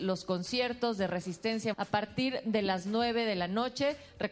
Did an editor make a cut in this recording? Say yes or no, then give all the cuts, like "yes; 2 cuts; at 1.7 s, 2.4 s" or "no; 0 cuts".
yes; 1 cut; at 1.7 s